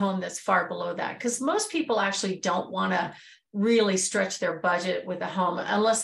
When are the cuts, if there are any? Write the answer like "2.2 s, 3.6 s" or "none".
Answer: none